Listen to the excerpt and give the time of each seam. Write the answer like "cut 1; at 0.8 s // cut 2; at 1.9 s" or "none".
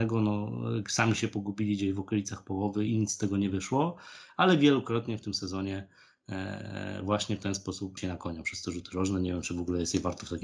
cut 1; at 2.9 s // cut 2; at 8.0 s